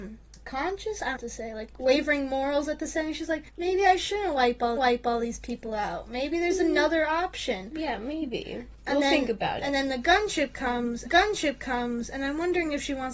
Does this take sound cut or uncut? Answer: cut